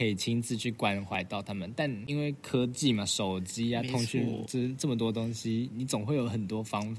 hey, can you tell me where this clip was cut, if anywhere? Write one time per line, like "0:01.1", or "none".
none